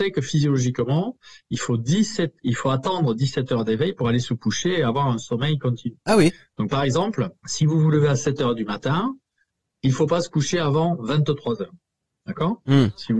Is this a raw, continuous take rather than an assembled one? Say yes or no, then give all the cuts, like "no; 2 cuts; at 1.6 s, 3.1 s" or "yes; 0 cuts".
yes; 0 cuts